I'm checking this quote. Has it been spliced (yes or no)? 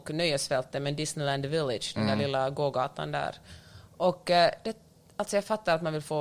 no